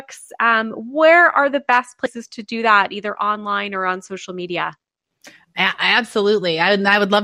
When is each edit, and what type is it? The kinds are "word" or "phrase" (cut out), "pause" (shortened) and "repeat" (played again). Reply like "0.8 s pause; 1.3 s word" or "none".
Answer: none